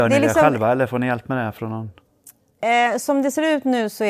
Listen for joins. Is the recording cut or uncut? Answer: uncut